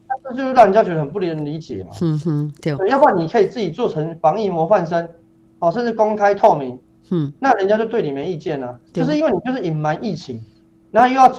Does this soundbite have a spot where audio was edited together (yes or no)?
no